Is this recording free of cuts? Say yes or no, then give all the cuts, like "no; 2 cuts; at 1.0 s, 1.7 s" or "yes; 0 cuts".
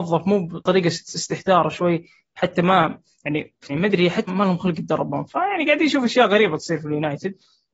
no; 2 cuts; at 3.7 s, 4.3 s